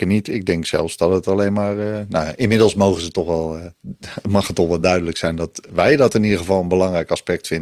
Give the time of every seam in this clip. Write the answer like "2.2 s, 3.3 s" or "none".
none